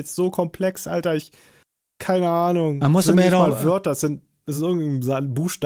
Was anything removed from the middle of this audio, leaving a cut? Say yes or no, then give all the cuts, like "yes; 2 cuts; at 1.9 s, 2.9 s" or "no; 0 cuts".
no; 0 cuts